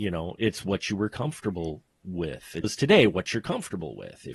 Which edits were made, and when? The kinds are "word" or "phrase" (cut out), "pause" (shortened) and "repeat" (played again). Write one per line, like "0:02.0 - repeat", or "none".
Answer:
0:02.6 - word